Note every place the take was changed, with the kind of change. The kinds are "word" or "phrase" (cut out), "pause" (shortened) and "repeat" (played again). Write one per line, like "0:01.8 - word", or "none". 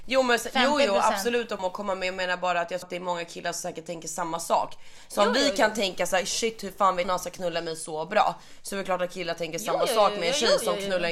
0:01.6 - word
0:02.8 - word
0:07.0 - word